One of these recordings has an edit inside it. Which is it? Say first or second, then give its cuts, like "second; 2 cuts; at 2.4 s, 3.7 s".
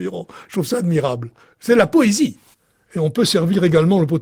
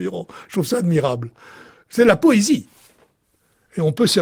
first; 2 cuts; at 1.4 s, 2.5 s